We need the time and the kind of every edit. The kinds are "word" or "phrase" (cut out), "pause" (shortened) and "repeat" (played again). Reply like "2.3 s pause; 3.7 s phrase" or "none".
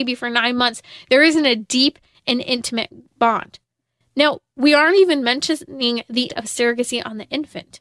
6.3 s word